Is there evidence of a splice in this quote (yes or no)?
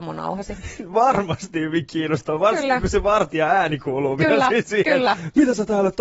no